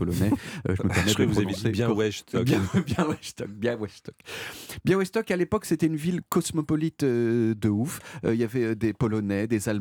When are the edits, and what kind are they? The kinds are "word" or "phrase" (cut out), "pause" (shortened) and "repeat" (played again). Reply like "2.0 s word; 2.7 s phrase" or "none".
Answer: none